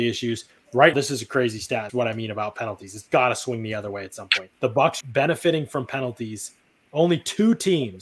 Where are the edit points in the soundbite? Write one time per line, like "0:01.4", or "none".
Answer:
0:00.9
0:01.9
0:04.5
0:05.0